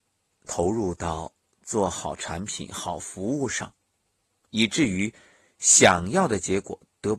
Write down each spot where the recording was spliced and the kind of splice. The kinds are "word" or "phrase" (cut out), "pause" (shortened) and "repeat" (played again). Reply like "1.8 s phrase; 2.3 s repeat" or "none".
none